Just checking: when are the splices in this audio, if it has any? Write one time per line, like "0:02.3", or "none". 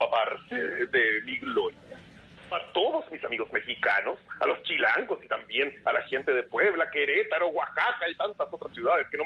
0:02.5